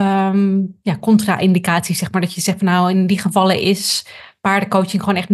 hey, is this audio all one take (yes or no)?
yes